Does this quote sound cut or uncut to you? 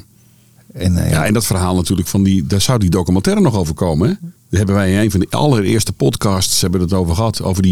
cut